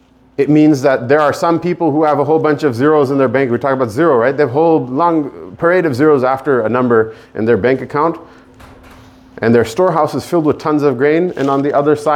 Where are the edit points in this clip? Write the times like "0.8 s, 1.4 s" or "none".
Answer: none